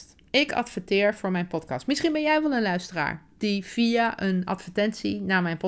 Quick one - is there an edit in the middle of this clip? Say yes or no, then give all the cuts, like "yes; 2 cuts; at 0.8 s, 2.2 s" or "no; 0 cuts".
no; 0 cuts